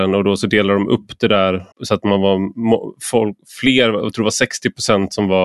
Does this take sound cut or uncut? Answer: cut